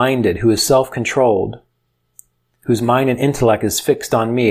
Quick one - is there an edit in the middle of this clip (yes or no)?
no